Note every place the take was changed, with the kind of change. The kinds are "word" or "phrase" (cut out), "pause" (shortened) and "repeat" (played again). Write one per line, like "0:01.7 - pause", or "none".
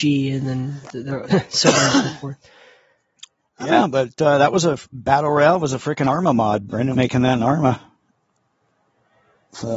0:01.3 - word
0:06.9 - word